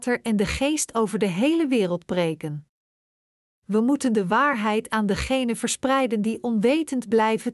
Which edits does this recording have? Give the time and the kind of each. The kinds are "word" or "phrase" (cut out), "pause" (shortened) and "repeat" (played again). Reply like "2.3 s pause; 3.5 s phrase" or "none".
none

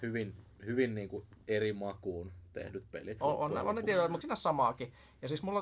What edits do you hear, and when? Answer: 1.4 s pause; 4.2 s word

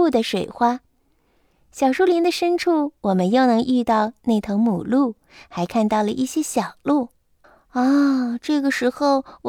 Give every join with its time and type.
7.4 s pause

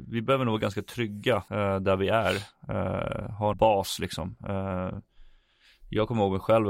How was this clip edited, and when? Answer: 1.5 s pause; 3.5 s phrase

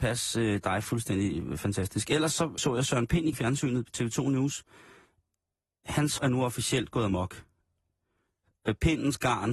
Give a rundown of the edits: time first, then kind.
2.6 s word; 3.3 s word; 6.2 s word

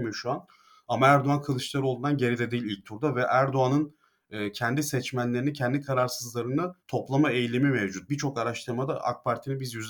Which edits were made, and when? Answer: 6.8 s pause

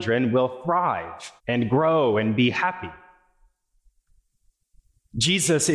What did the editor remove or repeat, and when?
1.4 s pause

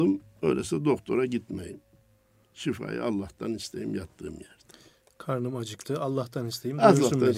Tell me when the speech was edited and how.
none

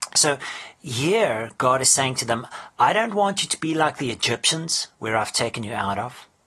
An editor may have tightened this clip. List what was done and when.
4.9 s pause

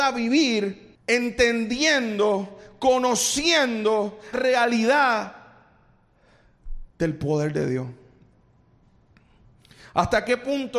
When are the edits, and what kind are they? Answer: 0.9 s pause; 4.3 s word; 6.9 s pause

